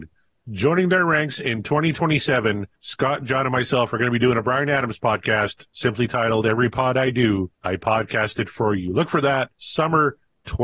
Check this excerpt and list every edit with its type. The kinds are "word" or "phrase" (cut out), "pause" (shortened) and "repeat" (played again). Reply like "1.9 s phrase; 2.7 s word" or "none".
2.8 s pause; 5.7 s pause; 7.5 s pause; 9.5 s pause